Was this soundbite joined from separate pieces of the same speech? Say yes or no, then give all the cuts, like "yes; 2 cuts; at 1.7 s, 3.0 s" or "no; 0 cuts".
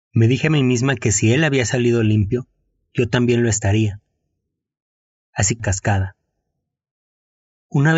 yes; 1 cut; at 5.6 s